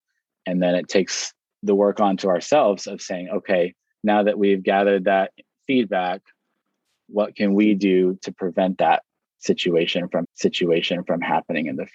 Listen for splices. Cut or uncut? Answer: cut